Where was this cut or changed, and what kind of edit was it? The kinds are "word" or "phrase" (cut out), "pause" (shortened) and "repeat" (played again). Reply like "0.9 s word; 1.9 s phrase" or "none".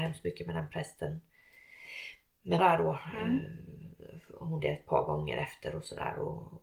2.6 s word; 4.6 s word